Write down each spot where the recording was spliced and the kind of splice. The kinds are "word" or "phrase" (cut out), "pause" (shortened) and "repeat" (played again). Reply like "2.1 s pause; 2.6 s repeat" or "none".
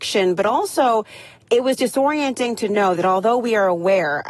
none